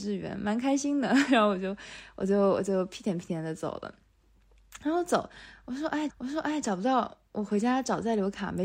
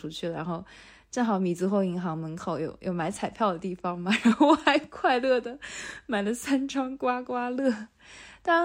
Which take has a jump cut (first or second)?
first